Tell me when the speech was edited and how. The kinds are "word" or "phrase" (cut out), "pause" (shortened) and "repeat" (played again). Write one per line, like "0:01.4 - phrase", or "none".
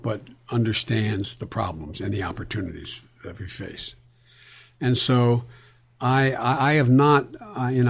none